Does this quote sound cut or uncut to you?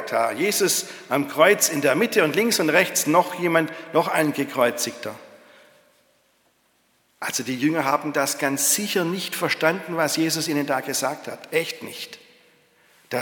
uncut